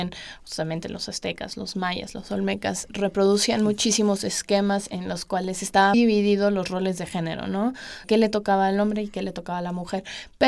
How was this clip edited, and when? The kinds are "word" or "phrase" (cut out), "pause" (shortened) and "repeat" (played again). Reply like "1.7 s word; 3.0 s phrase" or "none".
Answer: 2.9 s word; 5.9 s word; 8.0 s word